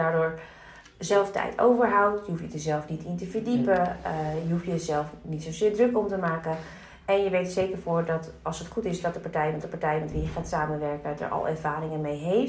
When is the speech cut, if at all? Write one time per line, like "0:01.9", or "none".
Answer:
0:09.6